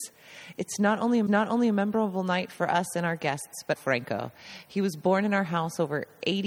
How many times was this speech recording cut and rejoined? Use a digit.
2